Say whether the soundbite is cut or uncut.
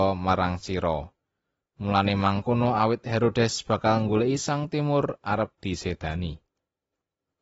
uncut